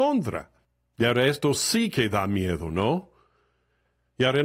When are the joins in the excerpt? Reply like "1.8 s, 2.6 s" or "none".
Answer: none